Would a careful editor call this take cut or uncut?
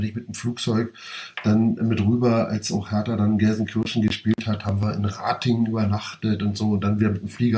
uncut